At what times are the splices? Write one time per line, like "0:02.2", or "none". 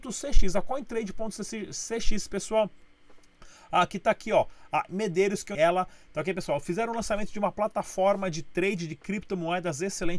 0:04.9
0:05.5